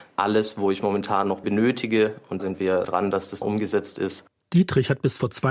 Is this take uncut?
no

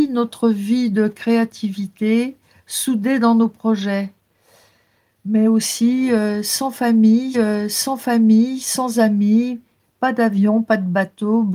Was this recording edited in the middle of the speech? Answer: yes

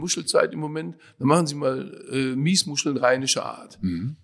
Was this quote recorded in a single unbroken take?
yes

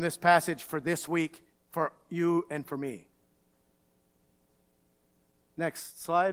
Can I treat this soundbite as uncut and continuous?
no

